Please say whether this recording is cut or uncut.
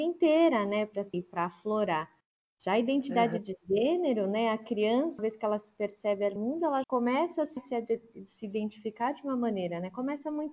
cut